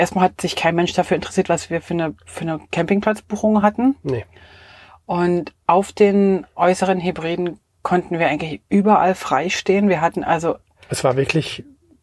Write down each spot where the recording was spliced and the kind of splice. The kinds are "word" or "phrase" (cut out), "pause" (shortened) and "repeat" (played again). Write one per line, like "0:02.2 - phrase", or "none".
none